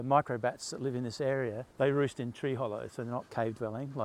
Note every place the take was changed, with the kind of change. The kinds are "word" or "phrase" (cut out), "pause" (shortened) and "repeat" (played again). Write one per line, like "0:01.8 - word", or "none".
0:01.7 - pause

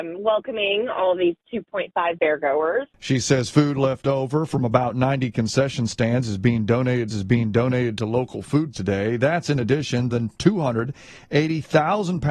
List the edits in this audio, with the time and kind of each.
0:02.2 - word
0:07.1 - repeat
0:08.7 - word
0:10.1 - phrase

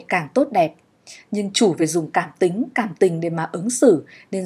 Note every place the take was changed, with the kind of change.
none

